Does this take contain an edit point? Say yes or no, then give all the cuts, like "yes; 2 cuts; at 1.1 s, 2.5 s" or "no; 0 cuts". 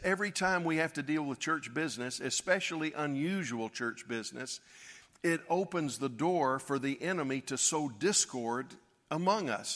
no; 0 cuts